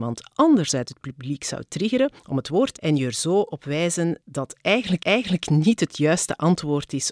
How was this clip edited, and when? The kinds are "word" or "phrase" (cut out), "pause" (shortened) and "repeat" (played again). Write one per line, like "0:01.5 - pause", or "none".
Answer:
0:02.2 - pause
0:02.8 - word
0:04.2 - word
0:05.0 - repeat

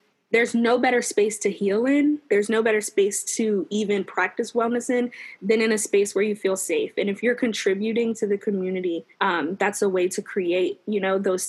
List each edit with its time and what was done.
0:09.1 - pause

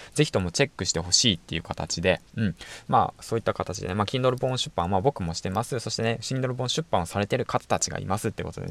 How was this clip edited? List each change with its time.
none

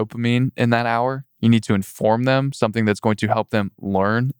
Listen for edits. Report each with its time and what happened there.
0:01.3 - pause

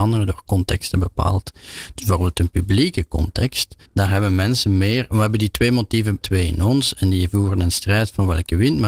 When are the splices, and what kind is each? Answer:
0:03.9 - pause
0:06.2 - word

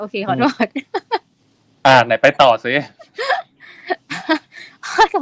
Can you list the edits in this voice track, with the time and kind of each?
none

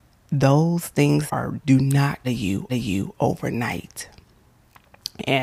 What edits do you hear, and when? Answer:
0:01.3 - word
0:01.6 - phrase
0:02.2 - phrase
0:02.7 - repeat

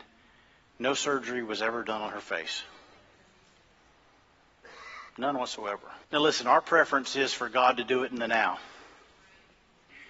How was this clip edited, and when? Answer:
0:05.1 - pause
0:06.0 - pause

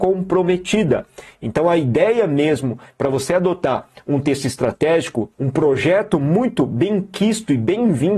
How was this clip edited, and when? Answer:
0:05.3 - pause

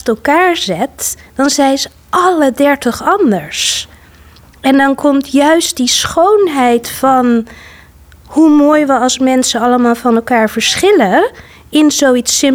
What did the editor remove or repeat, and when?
none

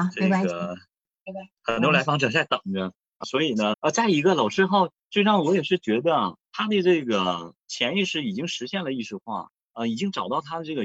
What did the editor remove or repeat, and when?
0:03.2 - word
0:03.7 - word
0:06.5 - pause
0:07.6 - pause
0:09.6 - pause

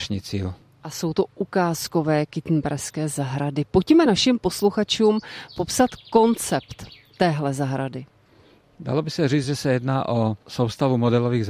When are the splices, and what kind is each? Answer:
none

